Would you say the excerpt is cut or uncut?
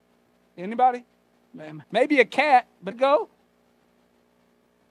cut